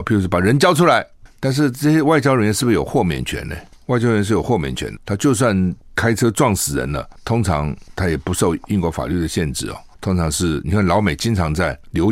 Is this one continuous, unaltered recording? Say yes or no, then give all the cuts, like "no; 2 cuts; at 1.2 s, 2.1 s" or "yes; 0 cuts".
no; 1 cut; at 5.0 s